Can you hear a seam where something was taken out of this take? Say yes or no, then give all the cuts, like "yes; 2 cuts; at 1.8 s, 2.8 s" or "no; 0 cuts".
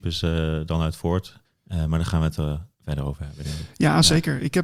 yes; 2 cuts; at 1.4 s, 2.7 s